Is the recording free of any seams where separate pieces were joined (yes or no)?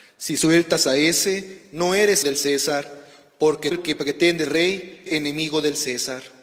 no